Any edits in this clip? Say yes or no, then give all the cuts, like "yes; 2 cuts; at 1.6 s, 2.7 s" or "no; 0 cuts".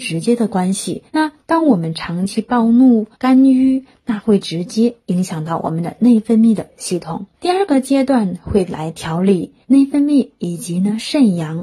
yes; 4 cuts; at 1.1 s, 3.1 s, 7.3 s, 9.6 s